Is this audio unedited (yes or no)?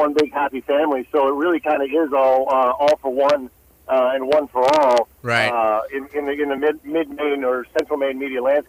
yes